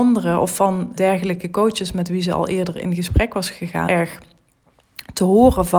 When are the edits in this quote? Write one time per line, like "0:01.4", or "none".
0:01.0
0:03.9